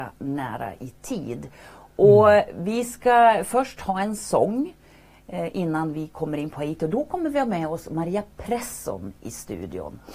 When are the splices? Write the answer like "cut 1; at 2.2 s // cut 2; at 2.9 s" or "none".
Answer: none